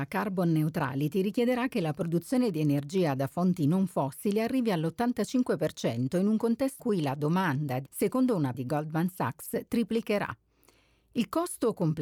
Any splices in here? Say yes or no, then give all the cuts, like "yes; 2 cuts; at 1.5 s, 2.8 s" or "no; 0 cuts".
yes; 3 cuts; at 6.8 s, 7.9 s, 8.5 s